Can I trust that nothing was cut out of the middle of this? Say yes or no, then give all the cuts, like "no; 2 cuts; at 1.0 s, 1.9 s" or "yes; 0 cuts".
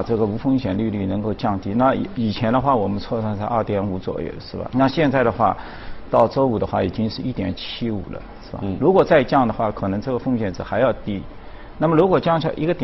no; 1 cut; at 4.7 s